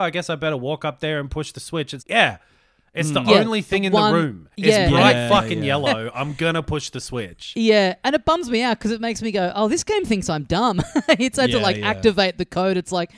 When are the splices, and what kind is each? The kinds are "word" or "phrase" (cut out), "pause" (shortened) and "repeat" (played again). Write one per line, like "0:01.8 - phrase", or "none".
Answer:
0:02.0 - word
0:04.5 - pause